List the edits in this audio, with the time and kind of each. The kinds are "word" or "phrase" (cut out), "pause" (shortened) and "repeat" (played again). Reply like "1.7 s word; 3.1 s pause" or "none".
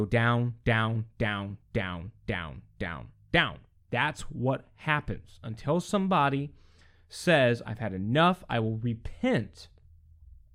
none